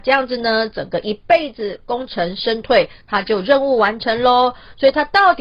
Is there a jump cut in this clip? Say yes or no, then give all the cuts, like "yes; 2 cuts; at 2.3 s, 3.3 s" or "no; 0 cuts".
no; 0 cuts